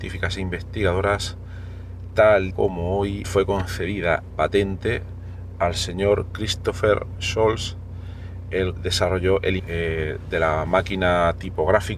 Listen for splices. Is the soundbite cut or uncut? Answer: cut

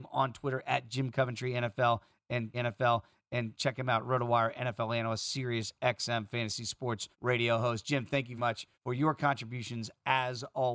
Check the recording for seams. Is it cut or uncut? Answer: cut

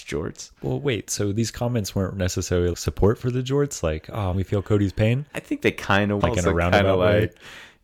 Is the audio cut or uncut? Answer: cut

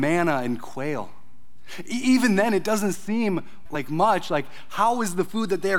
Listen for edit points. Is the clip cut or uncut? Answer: cut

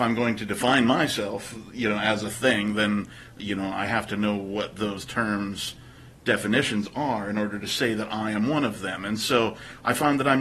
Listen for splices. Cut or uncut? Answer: uncut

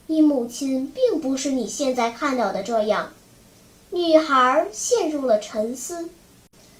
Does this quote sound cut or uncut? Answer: cut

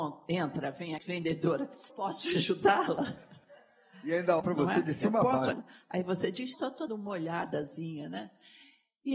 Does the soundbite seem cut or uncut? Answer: cut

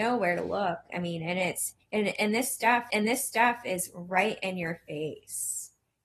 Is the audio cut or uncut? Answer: cut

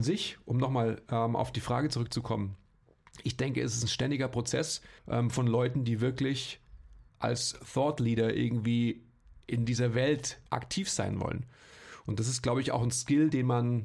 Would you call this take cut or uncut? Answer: cut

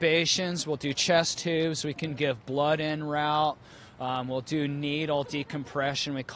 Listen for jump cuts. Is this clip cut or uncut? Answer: uncut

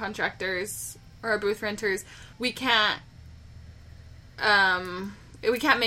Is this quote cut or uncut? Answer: cut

